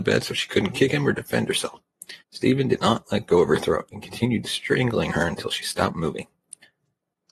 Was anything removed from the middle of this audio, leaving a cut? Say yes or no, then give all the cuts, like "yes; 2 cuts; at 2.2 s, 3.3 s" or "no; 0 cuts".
yes; 1 cut; at 2.2 s